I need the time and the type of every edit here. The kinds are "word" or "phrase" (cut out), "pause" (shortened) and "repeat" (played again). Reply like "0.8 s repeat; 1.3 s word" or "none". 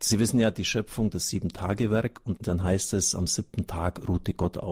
none